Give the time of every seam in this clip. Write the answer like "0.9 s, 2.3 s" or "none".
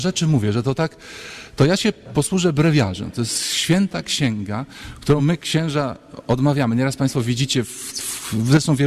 none